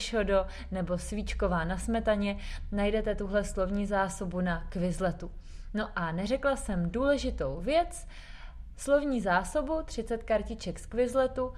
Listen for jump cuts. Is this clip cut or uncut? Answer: uncut